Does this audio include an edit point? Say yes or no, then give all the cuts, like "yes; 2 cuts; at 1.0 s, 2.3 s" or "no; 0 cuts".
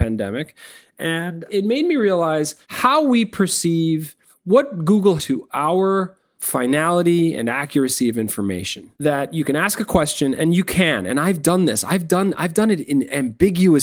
yes; 4 cuts; at 2.6 s, 5.2 s, 6.4 s, 8.9 s